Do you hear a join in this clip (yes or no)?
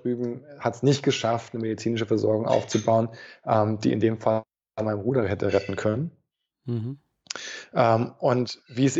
no